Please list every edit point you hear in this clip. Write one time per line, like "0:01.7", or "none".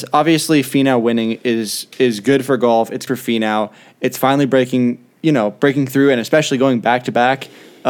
0:03.1